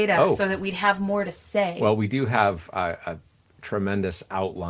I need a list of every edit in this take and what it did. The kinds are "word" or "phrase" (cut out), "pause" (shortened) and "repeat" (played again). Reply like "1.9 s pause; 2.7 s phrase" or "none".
none